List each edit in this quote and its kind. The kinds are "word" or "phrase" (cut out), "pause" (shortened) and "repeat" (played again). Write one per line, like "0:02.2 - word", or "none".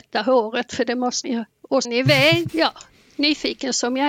0:01.2 - word
0:01.8 - word
0:02.5 - word

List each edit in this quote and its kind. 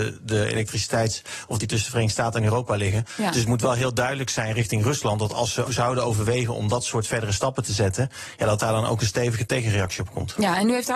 0:01.6 - word
0:05.7 - word

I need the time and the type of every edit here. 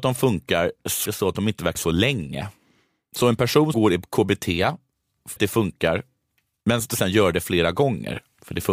0:01.1 - word
0:01.8 - word
0:03.7 - word
0:05.4 - word
0:06.9 - word

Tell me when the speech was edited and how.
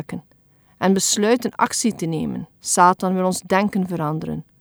0:02.6 - pause

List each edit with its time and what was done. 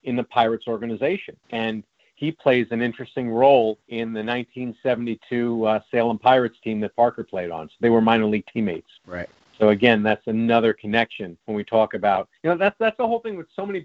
0:01.4 - pause
0:03.8 - pause
0:09.0 - pause
0:11.4 - pause
0:12.4 - pause

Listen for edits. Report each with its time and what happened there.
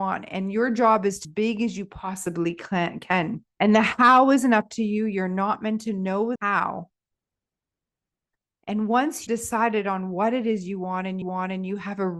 0:01.2 - phrase
0:03.5 - pause
0:06.4 - word
0:09.3 - word
0:11.2 - repeat

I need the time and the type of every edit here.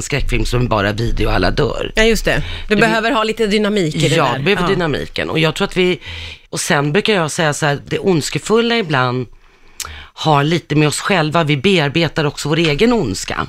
0:06.4 - pause

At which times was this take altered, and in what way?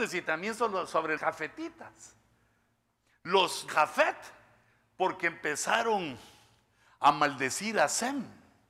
0:01.2 - word
0:03.7 - word

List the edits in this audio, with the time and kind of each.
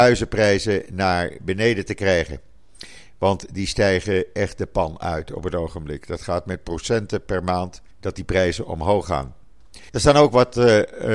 0:07.9 - pause
0:09.9 - pause

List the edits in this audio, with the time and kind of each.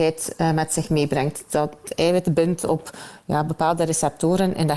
none

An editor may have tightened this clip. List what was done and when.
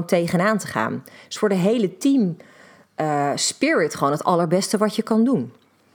none

